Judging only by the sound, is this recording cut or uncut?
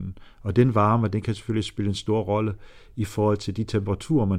uncut